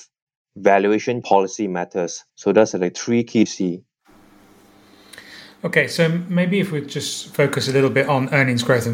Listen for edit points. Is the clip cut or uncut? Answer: cut